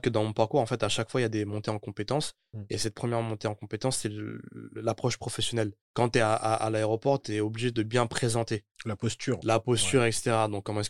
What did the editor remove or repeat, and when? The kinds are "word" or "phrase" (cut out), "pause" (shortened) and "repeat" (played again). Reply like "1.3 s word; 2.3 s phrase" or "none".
5.8 s pause

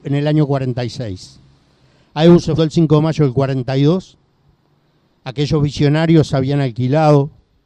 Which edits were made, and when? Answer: 2.6 s word

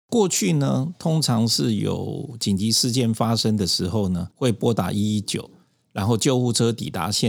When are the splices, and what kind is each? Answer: 4.3 s pause

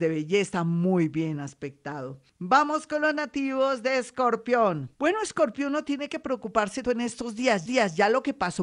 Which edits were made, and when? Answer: 2.3 s pause; 4.9 s pause; 6.8 s word; 7.7 s repeat

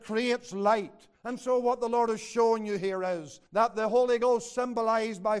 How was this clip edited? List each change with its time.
1.2 s pause; 3.5 s pause

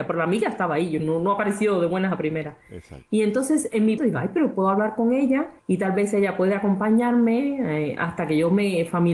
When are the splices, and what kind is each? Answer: 4.0 s word; 5.6 s pause

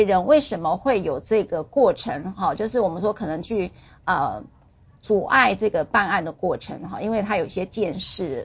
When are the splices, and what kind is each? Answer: none

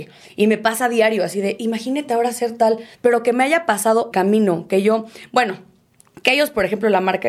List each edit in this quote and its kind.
2.9 s pause; 4.1 s phrase

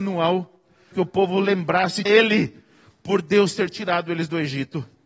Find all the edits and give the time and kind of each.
0.9 s word; 2.1 s phrase

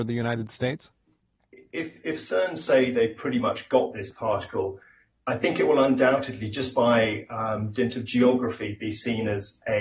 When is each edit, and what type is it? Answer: none

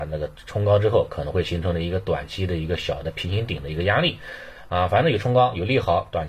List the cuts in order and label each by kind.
none

